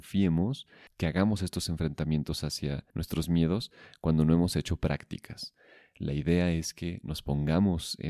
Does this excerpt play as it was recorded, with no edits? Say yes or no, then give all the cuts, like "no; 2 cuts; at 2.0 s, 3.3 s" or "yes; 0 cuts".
no; 1 cut; at 2.9 s